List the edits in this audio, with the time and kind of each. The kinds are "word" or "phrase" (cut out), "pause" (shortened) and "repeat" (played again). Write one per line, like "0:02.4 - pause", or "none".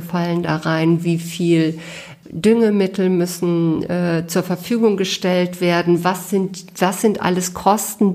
0:02.2 - word